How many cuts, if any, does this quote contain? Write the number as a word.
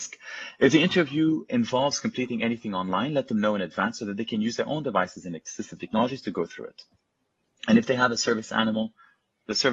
zero